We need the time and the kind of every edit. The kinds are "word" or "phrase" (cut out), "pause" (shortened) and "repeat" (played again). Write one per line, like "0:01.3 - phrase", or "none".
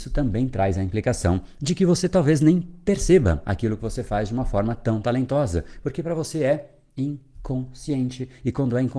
none

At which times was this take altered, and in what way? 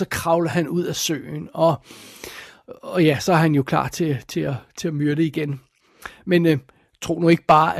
none

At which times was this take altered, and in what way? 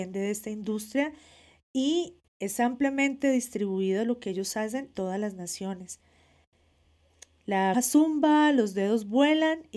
0:02.3 - pause
0:04.9 - word
0:07.7 - word

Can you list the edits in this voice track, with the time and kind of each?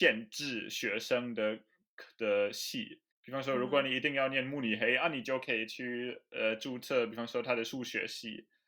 0:03.1 - pause

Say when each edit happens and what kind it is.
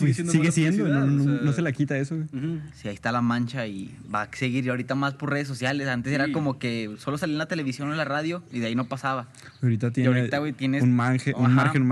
none

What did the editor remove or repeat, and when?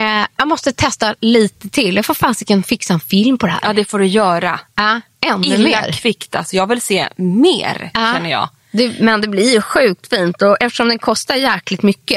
none

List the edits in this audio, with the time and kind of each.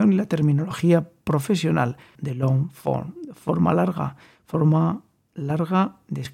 0:02.2 - phrase

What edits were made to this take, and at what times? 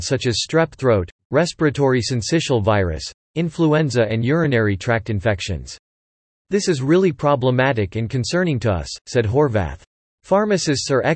none

